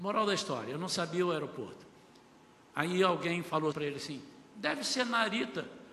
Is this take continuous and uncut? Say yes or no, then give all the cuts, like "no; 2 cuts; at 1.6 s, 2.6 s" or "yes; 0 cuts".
no; 1 cut; at 3.7 s